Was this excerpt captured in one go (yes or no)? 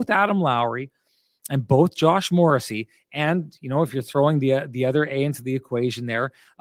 yes